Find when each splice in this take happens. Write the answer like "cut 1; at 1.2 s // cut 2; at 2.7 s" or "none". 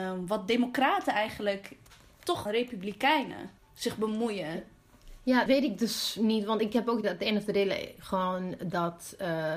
cut 1; at 2.5 s // cut 2; at 3.6 s // cut 3; at 5.5 s // cut 4; at 7.0 s